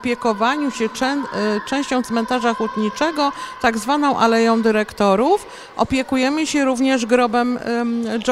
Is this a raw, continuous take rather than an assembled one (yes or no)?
yes